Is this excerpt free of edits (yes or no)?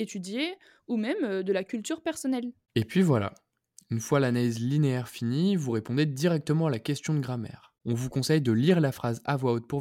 yes